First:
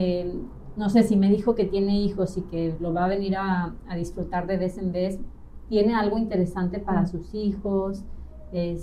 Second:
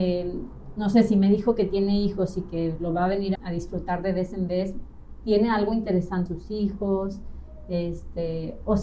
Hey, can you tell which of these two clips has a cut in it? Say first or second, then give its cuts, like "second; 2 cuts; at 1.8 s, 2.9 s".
second; 2 cuts; at 3.4 s, 6.3 s